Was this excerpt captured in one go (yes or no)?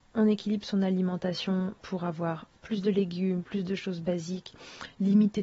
yes